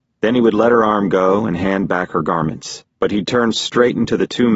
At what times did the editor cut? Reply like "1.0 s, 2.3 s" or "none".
2.9 s